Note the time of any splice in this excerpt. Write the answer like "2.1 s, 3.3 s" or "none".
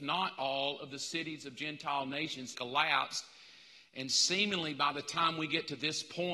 2.5 s

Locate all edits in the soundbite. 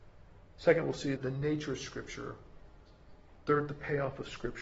1.2 s

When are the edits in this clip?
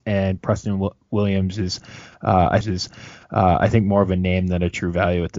2.6 s

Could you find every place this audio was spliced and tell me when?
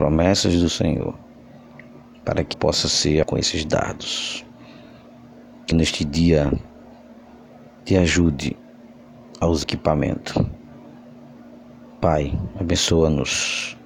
2.5 s, 3.2 s, 5.7 s, 9.6 s

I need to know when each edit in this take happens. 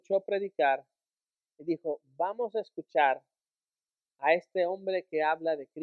none

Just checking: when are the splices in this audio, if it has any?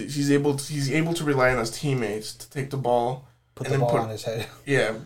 3.5 s

